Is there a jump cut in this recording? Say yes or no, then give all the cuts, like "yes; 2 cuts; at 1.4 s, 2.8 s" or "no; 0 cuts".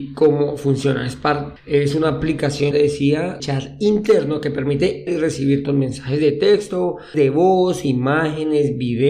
yes; 6 cuts; at 1.6 s, 2.7 s, 3.4 s, 5.1 s, 5.6 s, 7.1 s